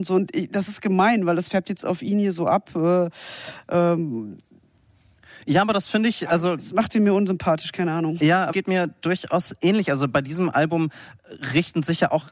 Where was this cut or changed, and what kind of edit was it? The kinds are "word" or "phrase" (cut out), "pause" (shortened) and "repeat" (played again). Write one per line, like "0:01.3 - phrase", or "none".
0:08.5 - word